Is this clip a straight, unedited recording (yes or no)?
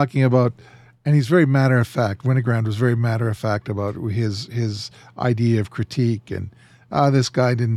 yes